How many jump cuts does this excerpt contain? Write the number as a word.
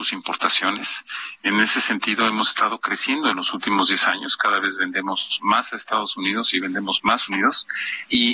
one